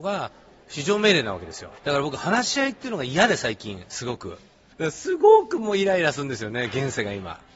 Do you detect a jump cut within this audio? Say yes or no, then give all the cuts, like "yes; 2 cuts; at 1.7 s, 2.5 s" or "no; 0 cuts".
yes; 1 cut; at 1.8 s